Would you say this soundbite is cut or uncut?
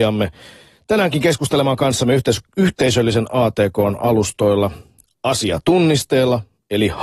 uncut